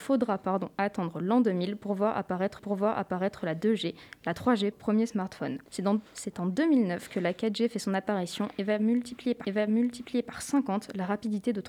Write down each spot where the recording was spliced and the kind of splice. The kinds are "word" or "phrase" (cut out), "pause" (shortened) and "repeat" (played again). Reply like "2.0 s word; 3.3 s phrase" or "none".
2.6 s repeat; 4.7 s phrase; 5.7 s pause; 6.1 s pause; 9.4 s repeat

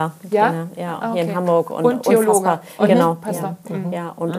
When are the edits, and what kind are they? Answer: none

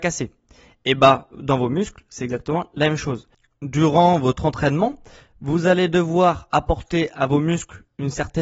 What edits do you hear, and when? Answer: none

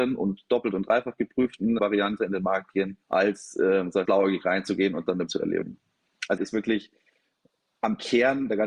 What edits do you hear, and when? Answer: 1.8 s word; 3.0 s pause; 4.1 s phrase; 5.3 s phrase; 6.4 s phrase

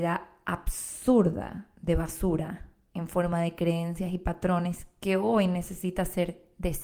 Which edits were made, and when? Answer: none

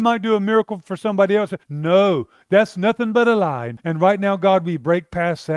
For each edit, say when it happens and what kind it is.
1.6 s pause; 3.8 s pause

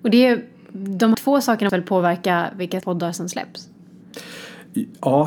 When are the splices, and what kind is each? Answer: 1.1 s word; 1.7 s word; 2.8 s word

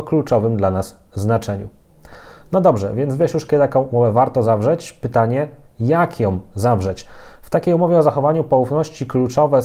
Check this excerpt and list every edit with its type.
none

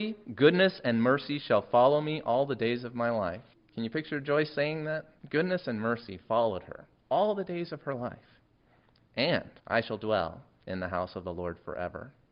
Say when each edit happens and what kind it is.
3.5 s pause; 5.2 s pause; 9.6 s pause

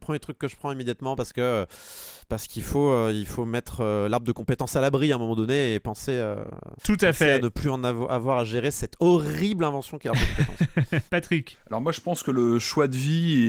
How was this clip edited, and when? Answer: 6.8 s pause; 11.1 s pause

